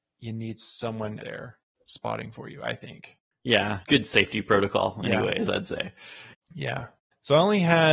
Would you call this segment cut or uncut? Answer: cut